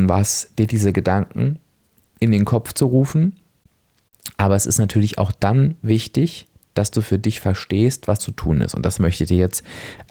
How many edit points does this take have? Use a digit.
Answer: 1